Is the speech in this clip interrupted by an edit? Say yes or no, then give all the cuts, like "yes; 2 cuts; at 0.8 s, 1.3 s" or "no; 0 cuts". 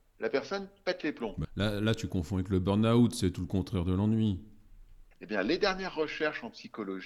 yes; 2 cuts; at 1.4 s, 5.1 s